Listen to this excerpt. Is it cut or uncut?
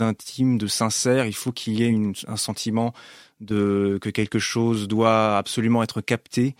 uncut